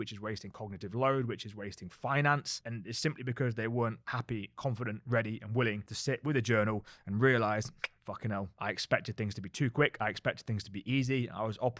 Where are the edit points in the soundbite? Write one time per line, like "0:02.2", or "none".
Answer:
0:04.0